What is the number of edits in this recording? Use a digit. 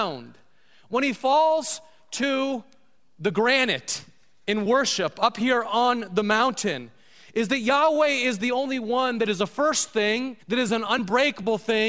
1